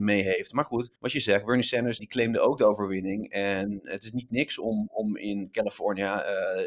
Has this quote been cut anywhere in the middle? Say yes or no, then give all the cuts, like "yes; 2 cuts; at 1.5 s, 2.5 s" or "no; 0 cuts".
yes; 2 cuts; at 1.0 s, 2.0 s